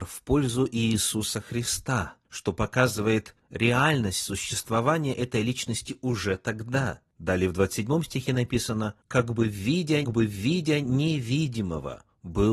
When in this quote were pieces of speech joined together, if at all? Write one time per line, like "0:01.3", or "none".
0:09.0
0:10.0